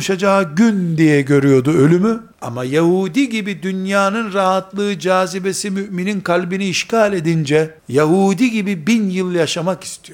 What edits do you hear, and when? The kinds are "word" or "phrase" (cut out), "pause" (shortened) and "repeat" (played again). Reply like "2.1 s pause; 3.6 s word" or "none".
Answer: 2.3 s pause; 7.8 s pause